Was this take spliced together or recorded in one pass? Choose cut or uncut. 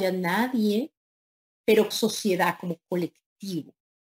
cut